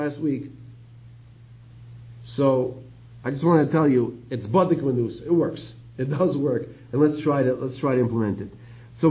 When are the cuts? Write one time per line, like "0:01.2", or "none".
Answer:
none